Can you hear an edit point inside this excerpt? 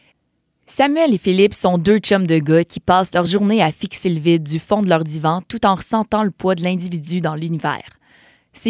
no; 0 cuts

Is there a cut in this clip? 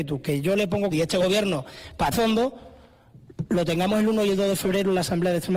yes; 2 cuts; at 0.9 s, 2.1 s

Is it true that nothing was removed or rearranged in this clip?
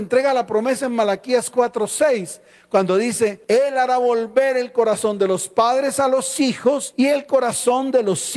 yes; 0 cuts

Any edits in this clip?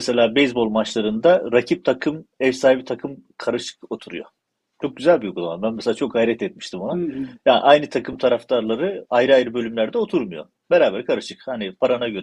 no; 0 cuts

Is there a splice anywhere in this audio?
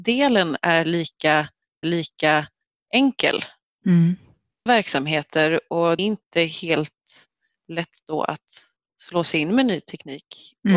yes; 3 cuts; at 1.8 s, 4.7 s, 6.0 s

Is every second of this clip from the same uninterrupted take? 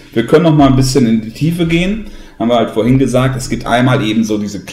yes; 0 cuts

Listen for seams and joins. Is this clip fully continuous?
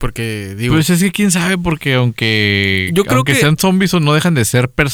yes; 0 cuts

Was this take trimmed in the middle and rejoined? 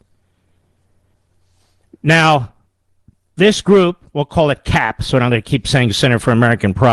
no; 0 cuts

